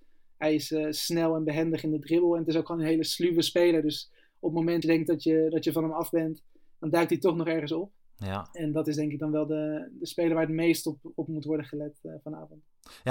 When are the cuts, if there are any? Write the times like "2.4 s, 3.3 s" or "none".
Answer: 4.8 s